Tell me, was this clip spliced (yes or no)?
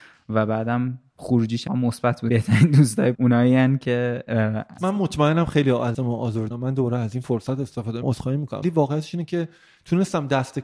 yes